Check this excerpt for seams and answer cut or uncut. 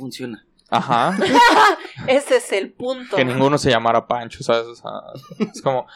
uncut